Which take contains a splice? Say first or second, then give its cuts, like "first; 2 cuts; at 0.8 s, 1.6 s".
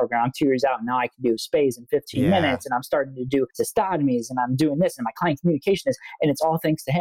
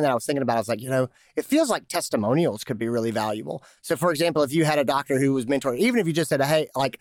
first; 1 cut; at 3.5 s